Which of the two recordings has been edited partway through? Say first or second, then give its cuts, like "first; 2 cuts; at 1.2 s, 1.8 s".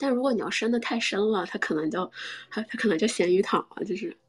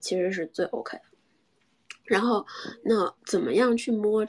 second; 1 cut; at 3.2 s